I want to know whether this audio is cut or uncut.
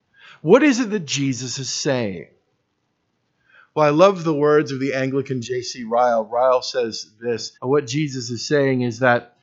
cut